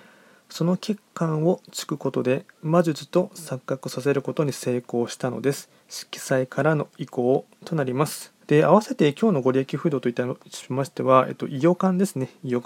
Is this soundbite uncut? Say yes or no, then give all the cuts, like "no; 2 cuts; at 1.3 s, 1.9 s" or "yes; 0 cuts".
no; 2 cuts; at 5.8 s, 8.4 s